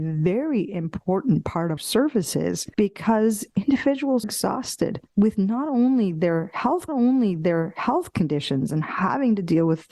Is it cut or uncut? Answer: cut